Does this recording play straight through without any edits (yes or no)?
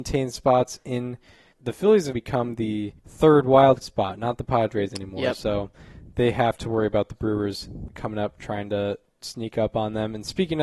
no